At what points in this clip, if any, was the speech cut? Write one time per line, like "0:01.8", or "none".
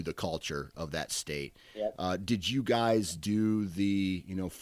none